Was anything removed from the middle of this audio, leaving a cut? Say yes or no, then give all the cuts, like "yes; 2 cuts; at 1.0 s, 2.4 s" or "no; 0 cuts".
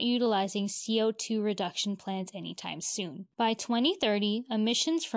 yes; 1 cut; at 3.3 s